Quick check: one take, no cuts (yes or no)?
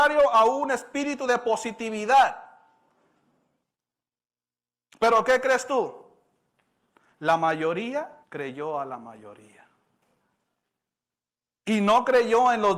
no